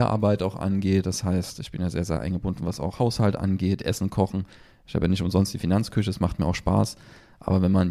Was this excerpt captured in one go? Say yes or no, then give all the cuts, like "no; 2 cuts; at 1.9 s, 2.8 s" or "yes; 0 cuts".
yes; 0 cuts